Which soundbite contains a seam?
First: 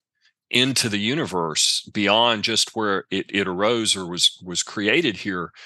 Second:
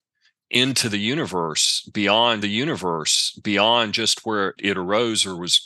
second; 2 cuts; at 2.4 s, 4.6 s

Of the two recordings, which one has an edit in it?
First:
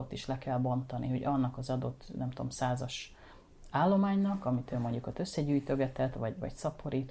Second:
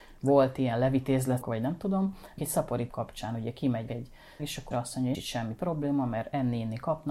second; 7 cuts; at 1.4 s, 2.4 s, 2.9 s, 3.9 s, 4.4 s, 4.7 s, 5.1 s

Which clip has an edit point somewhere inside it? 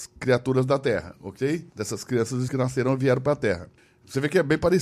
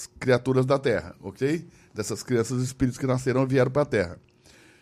first; 3 cuts; at 1.7 s, 2.5 s, 3.8 s

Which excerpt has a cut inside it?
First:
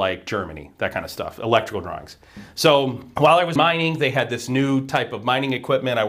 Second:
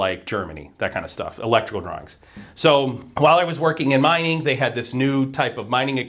first; 1 cut; at 3.6 s

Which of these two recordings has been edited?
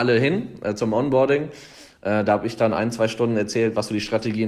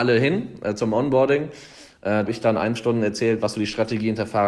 second; 2 cuts; at 2.3 s, 2.8 s

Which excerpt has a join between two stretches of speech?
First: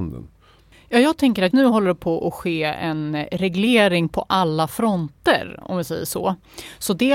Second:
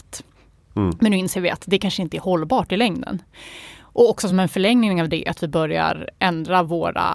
first; 1 cut; at 1.5 s

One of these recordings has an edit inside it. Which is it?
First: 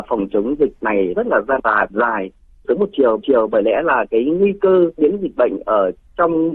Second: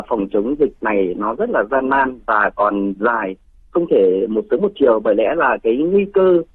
first; 6 cuts; at 1.1 s, 1.6 s, 1.9 s, 2.6 s, 3.2 s, 5.0 s

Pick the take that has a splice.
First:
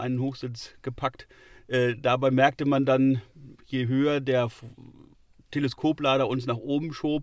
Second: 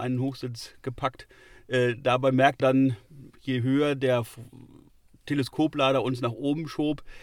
second; 1 cut; at 2.6 s

